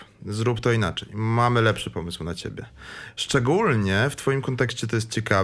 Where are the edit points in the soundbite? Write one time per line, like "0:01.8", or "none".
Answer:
none